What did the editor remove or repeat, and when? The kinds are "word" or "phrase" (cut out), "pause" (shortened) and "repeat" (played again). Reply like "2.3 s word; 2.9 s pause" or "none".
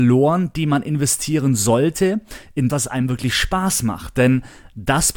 2.7 s word